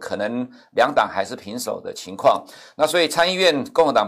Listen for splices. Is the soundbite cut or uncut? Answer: uncut